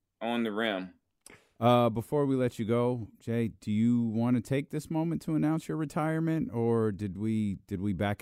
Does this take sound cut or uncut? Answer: uncut